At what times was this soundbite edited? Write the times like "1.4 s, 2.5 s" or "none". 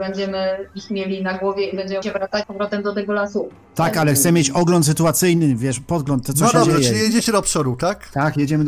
2.0 s, 2.4 s